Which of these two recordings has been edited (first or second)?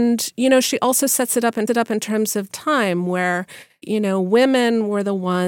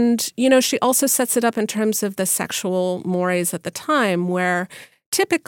first